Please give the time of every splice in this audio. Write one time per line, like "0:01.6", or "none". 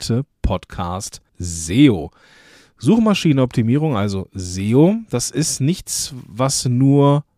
0:01.3